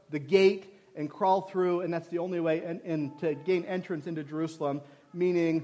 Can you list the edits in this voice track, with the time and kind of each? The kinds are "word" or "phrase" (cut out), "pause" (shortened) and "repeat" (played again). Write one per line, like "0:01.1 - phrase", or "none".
none